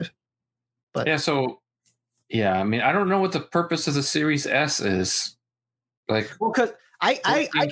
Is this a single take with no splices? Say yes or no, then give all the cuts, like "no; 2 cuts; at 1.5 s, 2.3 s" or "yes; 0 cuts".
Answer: yes; 0 cuts